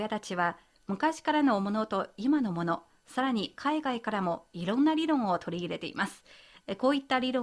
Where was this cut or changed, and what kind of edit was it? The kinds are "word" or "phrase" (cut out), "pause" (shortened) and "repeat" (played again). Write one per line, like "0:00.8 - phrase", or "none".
none